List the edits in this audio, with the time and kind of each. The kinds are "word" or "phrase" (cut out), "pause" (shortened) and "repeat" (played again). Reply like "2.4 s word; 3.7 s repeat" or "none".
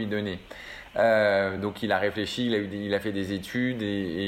none

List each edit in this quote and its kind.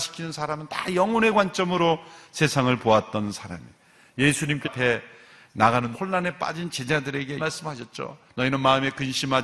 4.6 s word; 5.9 s word; 7.4 s word

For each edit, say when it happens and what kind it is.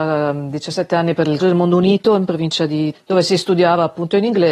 1.4 s word; 2.9 s word

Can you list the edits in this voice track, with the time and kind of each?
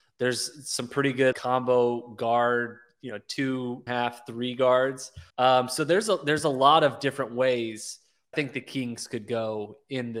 1.3 s word; 3.9 s phrase; 5.3 s pause; 8.3 s phrase

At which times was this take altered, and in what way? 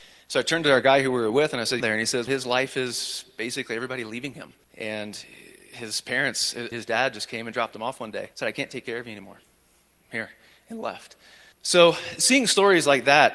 1.8 s phrase; 2.3 s word; 4.6 s pause; 6.7 s word; 8.3 s pause; 11.5 s pause

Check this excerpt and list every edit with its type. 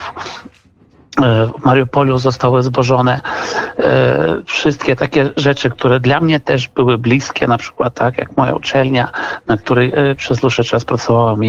none

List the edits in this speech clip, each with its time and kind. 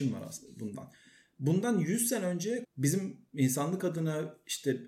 2.6 s word

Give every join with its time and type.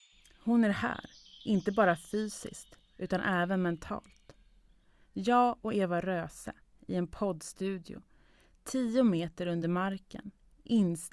none

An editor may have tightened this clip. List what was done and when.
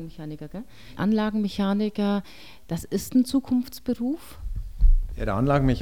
1.0 s word

